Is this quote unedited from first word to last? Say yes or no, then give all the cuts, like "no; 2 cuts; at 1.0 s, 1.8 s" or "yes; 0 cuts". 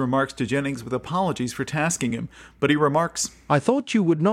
yes; 0 cuts